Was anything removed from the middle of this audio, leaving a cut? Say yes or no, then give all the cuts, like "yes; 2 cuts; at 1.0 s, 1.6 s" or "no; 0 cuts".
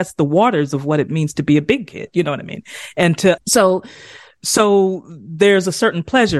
yes; 1 cut; at 3.4 s